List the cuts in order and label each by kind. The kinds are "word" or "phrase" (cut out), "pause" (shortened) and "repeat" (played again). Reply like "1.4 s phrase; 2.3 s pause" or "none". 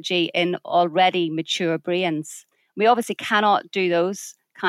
2.5 s pause